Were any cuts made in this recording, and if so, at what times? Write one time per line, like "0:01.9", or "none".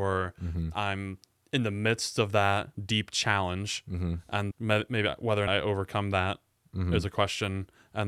0:02.7
0:04.5
0:05.5